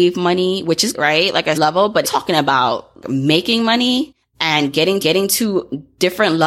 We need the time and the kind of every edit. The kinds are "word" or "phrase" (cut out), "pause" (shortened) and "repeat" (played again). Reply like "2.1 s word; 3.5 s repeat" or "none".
0.9 s word; 1.5 s word; 2.0 s phrase; 3.0 s word; 4.2 s pause; 5.0 s repeat

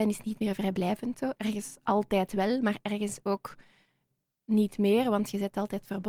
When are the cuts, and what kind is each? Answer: none

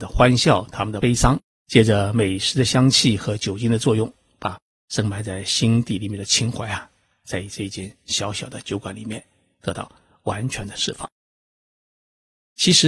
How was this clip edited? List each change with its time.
none

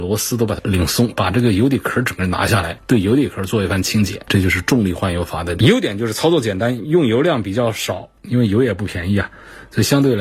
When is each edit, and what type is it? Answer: 8.2 s pause

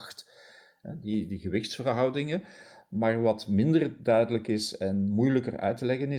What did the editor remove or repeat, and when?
none

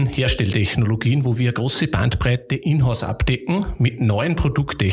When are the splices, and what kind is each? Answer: none

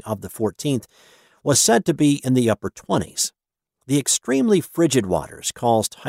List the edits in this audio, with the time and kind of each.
none

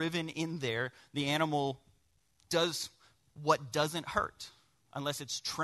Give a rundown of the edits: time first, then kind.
none

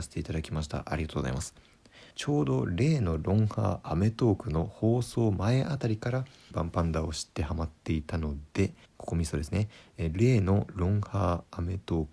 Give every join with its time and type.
2.1 s pause; 6.5 s word; 8.9 s pause

